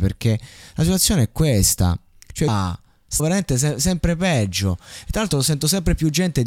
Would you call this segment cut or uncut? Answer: cut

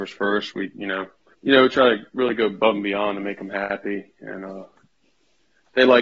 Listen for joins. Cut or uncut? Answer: cut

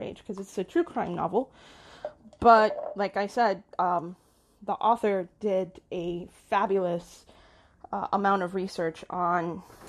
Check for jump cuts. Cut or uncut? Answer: uncut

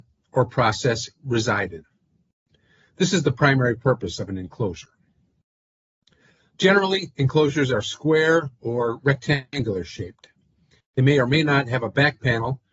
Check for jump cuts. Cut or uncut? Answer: uncut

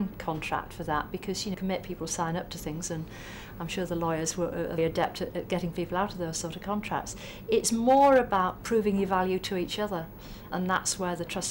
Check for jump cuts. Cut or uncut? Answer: cut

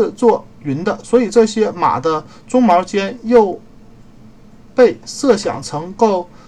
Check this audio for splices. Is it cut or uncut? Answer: uncut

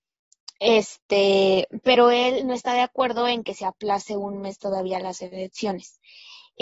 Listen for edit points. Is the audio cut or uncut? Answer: uncut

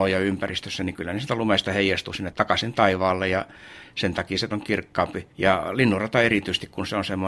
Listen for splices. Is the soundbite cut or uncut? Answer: cut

